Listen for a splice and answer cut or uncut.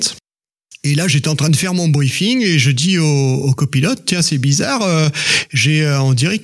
uncut